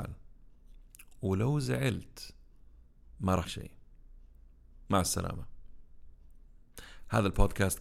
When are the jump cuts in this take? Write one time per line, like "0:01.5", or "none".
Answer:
0:03.4

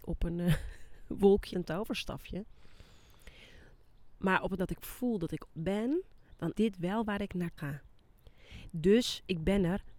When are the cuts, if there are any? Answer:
0:01.5
0:04.6
0:05.5
0:06.5
0:07.6

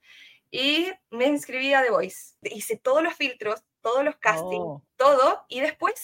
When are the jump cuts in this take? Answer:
0:01.0
0:02.4
0:04.9

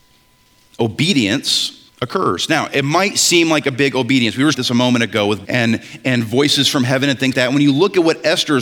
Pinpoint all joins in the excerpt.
0:01.9
0:04.5
0:05.4
0:07.3

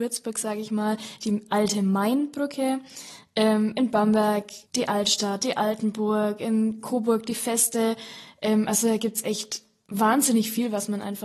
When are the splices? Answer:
0:04.7

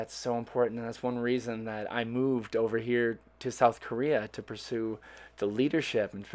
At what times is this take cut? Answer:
none

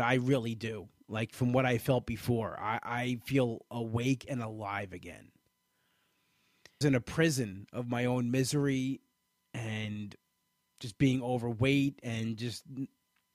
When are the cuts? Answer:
0:06.8

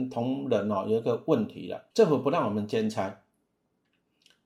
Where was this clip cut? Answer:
0:01.9

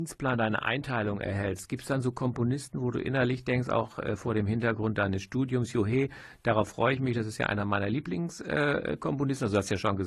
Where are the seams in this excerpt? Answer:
none

